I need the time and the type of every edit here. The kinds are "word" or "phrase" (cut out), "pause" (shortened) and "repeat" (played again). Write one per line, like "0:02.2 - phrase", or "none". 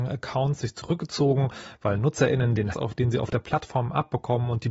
0:02.7 - word

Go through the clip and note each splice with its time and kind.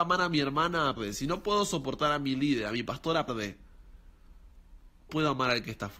0:01.0 - word
0:03.3 - word
0:05.1 - word

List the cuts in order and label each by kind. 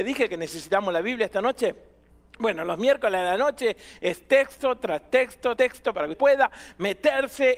0:05.6 - word
0:06.1 - word

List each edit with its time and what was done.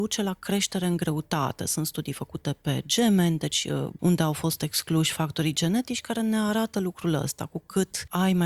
none

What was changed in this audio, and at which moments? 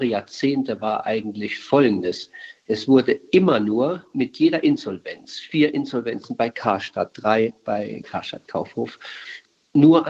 0:08.0 - word

